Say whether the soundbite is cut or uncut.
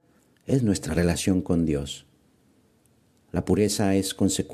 uncut